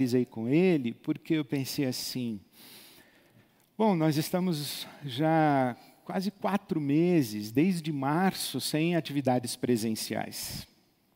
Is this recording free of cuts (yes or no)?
yes